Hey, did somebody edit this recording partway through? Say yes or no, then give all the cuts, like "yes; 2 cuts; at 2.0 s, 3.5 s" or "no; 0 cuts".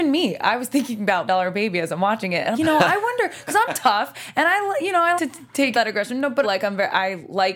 yes; 5 cuts; at 1.3 s, 2.5 s, 5.2 s, 5.7 s, 6.4 s